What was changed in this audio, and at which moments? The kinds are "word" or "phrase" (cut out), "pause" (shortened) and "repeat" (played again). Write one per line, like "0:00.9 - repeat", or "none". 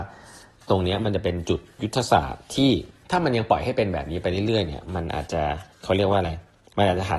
0:03.0 - pause
0:05.7 - pause